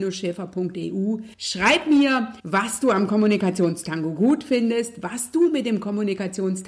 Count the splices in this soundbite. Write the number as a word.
two